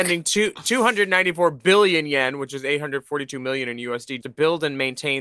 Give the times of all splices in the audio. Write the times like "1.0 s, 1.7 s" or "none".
4.2 s